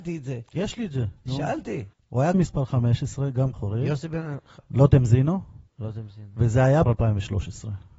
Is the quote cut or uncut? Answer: cut